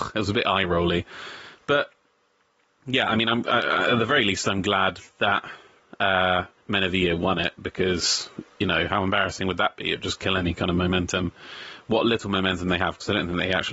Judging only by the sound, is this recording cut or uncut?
cut